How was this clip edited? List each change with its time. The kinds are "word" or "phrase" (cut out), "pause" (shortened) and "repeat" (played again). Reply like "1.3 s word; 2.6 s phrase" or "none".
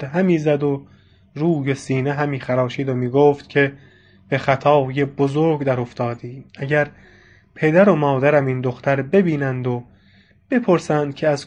6.5 s pause